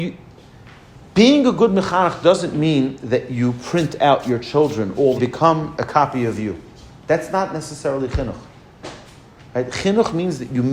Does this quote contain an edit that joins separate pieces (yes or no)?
yes